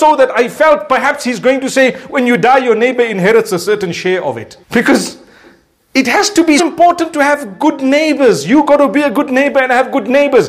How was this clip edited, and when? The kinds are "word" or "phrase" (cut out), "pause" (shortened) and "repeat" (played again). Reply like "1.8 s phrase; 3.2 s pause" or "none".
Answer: 4.6 s pause; 6.6 s word